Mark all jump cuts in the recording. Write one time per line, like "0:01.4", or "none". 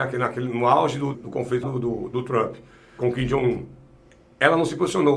0:01.1
0:01.6
0:03.0